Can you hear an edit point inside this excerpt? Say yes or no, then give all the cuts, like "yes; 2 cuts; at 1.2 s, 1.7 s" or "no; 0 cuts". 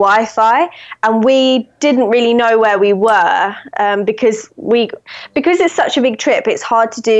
no; 0 cuts